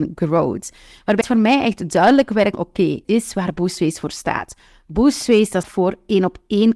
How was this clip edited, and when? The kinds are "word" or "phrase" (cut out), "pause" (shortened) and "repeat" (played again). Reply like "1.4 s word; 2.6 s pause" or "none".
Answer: 1.2 s word; 2.5 s word; 3.0 s word; 5.6 s word